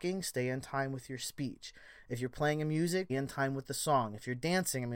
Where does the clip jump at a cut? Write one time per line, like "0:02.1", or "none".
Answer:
0:03.1